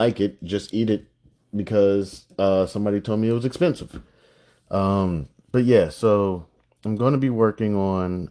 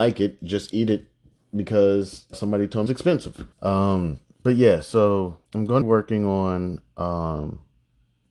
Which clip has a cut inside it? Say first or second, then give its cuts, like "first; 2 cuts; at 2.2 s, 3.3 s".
second; 5 cuts; at 2.3 s, 2.9 s, 3.5 s, 5.4 s, 5.8 s